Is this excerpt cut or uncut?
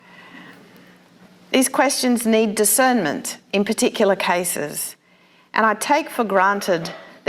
uncut